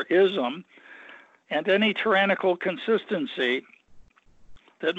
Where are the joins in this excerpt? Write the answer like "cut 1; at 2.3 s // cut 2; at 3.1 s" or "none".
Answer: none

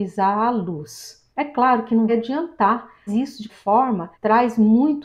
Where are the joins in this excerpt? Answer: cut 1; at 1.3 s // cut 2; at 2.1 s // cut 3; at 3.1 s // cut 4; at 3.5 s // cut 5; at 4.1 s

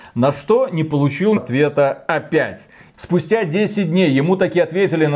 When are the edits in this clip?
cut 1; at 1.4 s

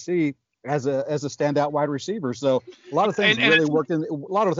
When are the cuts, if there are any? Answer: none

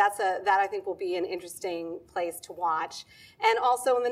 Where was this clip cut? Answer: none

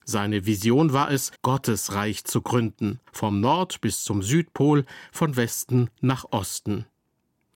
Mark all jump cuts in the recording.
cut 1; at 1.4 s // cut 2; at 3.1 s

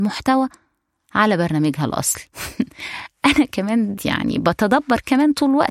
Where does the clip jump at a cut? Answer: cut 1; at 2.3 s // cut 2; at 4.0 s

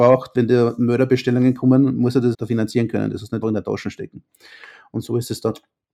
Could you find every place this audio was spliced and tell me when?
cut 1; at 2.3 s // cut 2; at 3.4 s

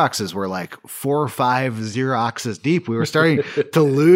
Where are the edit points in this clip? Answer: none

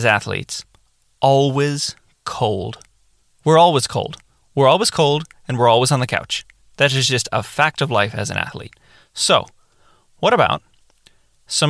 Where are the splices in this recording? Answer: none

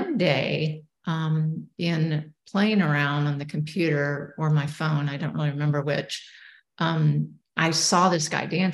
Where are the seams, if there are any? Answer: none

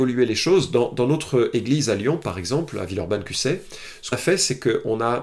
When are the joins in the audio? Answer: cut 1; at 4.1 s

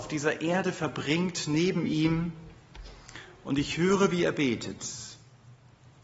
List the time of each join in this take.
none

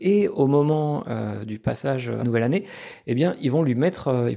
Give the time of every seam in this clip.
cut 1; at 2.2 s

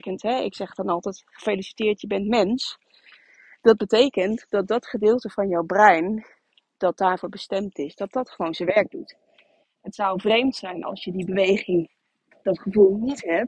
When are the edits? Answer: none

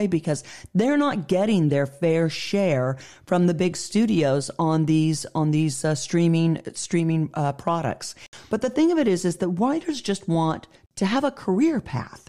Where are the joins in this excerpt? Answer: none

